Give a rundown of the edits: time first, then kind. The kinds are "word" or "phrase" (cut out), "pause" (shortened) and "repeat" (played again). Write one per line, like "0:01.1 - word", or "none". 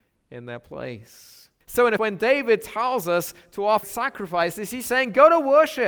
0:01.6 - pause
0:02.0 - word
0:03.8 - word

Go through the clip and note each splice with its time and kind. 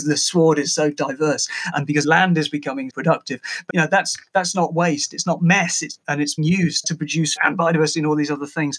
0:01.7 - word
0:02.0 - word
0:02.9 - word
0:03.7 - word
0:06.0 - word
0:06.4 - word
0:06.8 - word
0:07.4 - word

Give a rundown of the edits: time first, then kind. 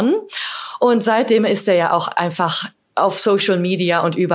none

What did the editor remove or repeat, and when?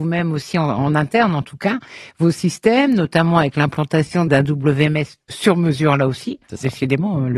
0:04.3 - word

